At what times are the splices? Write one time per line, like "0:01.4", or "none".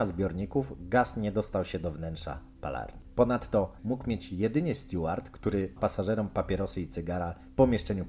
0:03.8
0:05.8